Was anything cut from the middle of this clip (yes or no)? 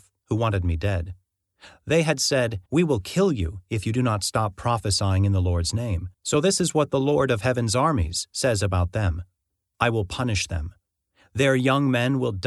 yes